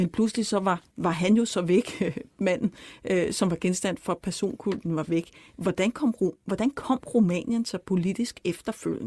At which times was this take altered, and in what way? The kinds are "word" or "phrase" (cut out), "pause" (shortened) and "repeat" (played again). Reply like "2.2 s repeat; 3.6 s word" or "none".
2.3 s pause

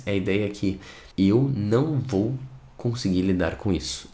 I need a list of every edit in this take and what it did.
1.1 s pause

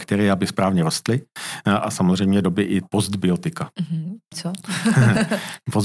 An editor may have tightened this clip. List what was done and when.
2.4 s phrase; 2.8 s word; 4.3 s word

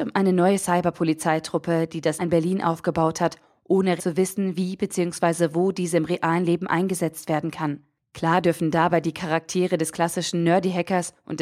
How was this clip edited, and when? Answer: 2.2 s word; 4.0 s word; 8.0 s pause

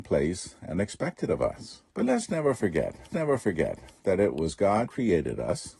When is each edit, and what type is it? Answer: 1.9 s pause; 3.1 s repeat; 4.9 s word

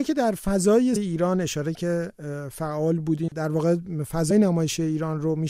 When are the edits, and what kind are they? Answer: 1.0 s word; 1.7 s word; 3.3 s word; 4.3 s word

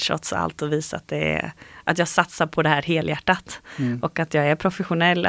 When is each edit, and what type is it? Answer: none

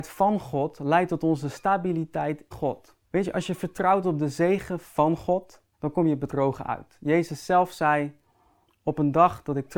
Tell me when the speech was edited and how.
2.5 s word; 3.0 s pause; 5.7 s pause

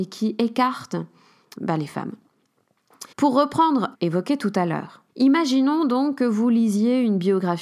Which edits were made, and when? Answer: 1.6 s word; 3.1 s pause; 3.9 s word; 5.1 s pause

